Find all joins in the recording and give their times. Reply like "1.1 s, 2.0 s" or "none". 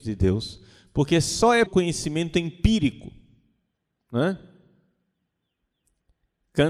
1.7 s

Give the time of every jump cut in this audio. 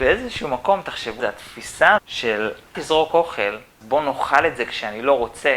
1.2 s, 2.0 s, 2.7 s, 3.8 s

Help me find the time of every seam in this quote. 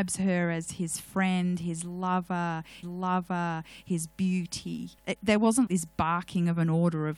2.8 s, 5.0 s, 5.7 s

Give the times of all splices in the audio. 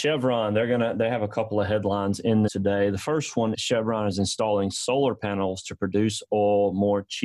2.5 s, 3.5 s

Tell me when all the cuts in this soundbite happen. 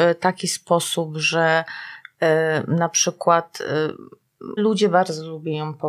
4.6 s

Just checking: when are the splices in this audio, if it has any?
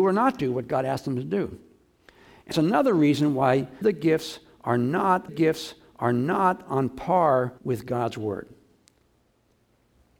2.5 s, 3.8 s, 5.3 s, 7.6 s

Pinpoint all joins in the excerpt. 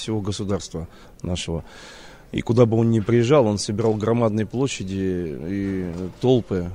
1.0 s

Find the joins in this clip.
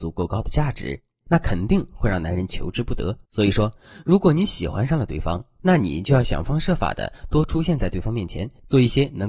3.2 s

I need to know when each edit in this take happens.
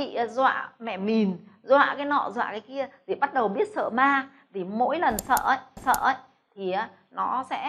5.8 s

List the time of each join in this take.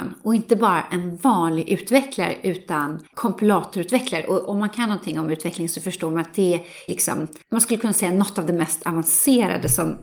3.1 s, 6.9 s, 7.4 s

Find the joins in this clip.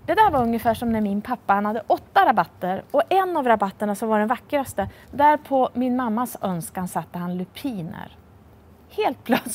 5.0 s

